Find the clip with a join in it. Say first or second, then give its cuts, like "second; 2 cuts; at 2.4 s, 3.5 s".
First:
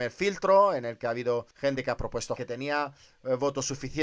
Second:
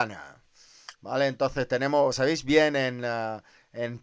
first; 2 cuts; at 1.5 s, 2.4 s